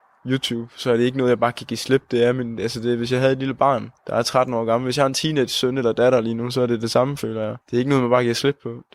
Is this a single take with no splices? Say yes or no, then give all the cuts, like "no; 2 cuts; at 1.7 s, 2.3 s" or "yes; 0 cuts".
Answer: no; 2 cuts; at 4.0 s, 7.6 s